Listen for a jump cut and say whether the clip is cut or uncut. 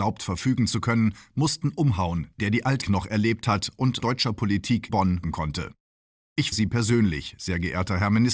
cut